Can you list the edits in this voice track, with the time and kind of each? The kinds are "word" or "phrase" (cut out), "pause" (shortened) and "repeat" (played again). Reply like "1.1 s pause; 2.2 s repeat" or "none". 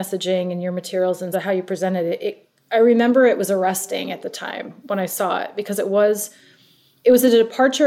1.3 s word

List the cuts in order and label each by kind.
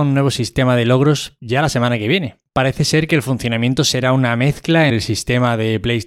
4.9 s word

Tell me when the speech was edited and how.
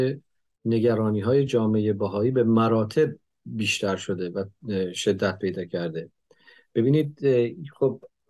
none

